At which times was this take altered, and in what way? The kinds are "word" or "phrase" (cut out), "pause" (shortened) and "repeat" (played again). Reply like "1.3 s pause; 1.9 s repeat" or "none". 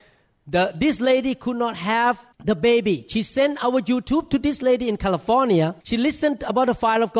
2.3 s pause; 5.8 s pause